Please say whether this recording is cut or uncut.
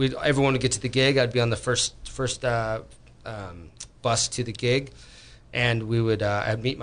uncut